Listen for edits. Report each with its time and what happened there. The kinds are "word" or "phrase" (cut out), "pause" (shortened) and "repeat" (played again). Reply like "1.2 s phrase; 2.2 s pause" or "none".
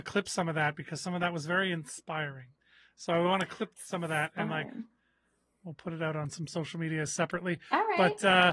none